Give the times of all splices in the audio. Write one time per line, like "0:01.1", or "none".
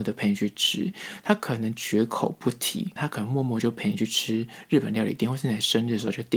0:03.0